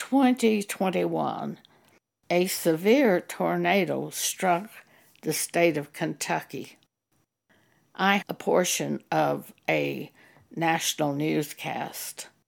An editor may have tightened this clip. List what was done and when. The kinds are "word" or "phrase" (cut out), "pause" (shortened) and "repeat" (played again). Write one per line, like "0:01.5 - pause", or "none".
0:08.2 - word